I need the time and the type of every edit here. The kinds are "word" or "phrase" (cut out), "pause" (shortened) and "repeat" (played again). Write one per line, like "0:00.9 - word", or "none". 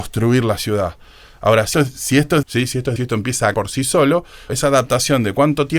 0:01.7 - word
0:02.4 - word
0:03.0 - word
0:03.5 - word
0:04.5 - word